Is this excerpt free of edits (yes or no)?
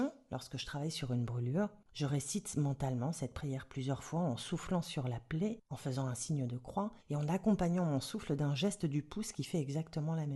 no